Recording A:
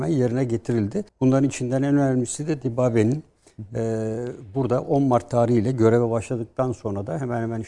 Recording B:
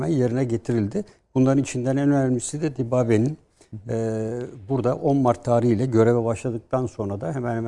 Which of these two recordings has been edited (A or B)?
A